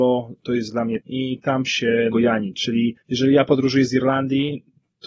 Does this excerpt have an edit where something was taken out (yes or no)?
yes